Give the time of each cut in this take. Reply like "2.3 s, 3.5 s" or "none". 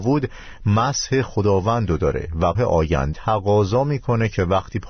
2.5 s, 3.1 s

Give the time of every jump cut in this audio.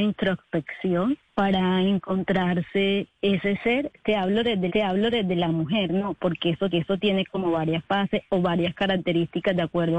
1.3 s, 4.7 s, 6.7 s

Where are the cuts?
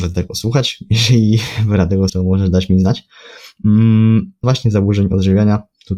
2.1 s, 4.4 s

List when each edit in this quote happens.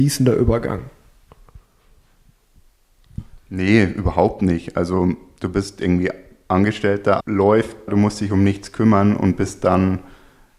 7.2 s, 7.9 s

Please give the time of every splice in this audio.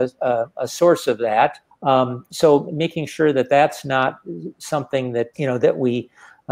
1.7 s, 5.3 s

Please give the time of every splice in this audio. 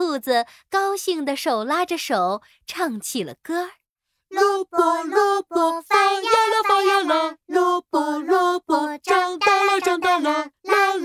none

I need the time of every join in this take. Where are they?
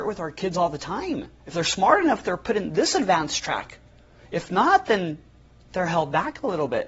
1.4 s

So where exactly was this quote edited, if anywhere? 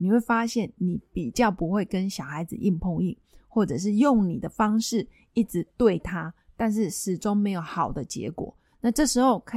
none

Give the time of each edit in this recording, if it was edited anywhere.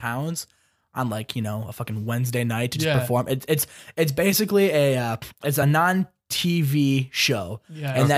none

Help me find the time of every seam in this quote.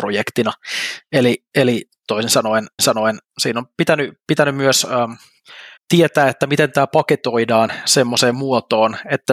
2.8 s, 5.8 s

